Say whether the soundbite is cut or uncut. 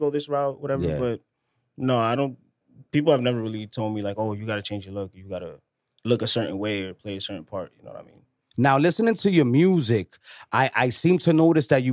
uncut